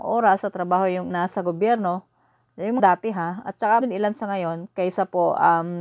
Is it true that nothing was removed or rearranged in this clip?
no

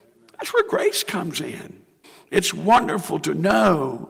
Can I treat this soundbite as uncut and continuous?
no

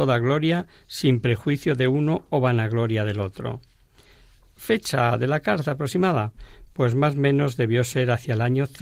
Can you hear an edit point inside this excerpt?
no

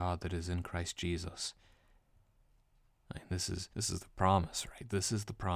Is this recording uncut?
no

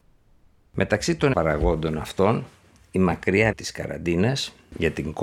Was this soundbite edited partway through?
yes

